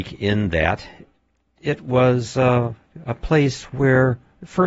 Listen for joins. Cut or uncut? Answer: uncut